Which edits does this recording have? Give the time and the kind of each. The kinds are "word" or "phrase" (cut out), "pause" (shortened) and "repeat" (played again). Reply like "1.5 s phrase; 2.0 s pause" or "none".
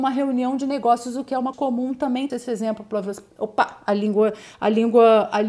1.5 s phrase; 2.3 s word; 3.3 s pause

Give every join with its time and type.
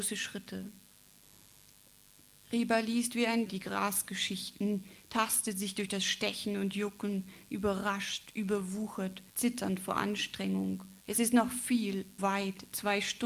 3.5 s word; 9.3 s pause; 11.0 s pause; 12.2 s word

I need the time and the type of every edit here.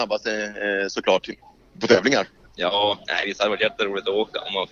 none

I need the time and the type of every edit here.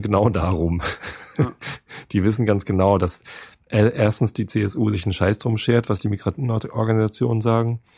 none

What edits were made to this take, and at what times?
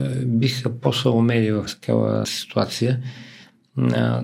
1.7 s word; 2.2 s word

